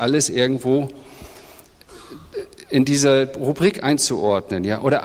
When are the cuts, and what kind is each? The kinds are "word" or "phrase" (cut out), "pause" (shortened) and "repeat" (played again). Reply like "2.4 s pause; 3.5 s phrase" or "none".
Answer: none